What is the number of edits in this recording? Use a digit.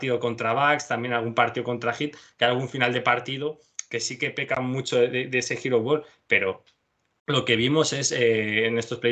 0